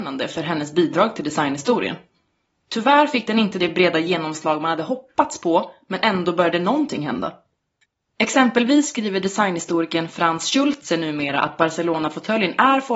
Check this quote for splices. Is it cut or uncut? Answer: uncut